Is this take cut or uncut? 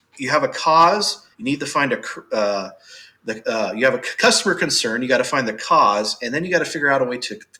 cut